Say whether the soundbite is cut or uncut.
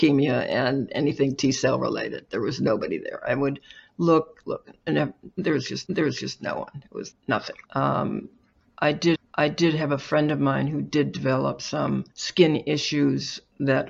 cut